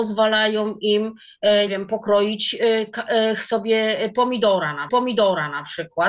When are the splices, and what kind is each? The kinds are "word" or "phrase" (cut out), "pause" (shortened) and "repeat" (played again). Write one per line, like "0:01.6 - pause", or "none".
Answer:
0:01.7 - word
0:04.9 - repeat